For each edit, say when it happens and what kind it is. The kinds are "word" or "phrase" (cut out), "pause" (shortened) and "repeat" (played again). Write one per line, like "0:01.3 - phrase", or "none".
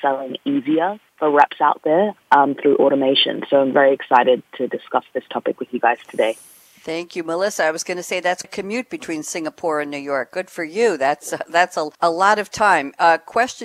0:01.1 - pause
0:08.4 - word
0:11.9 - pause